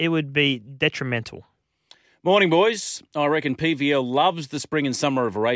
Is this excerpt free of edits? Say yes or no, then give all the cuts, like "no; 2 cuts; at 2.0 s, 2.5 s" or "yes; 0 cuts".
yes; 0 cuts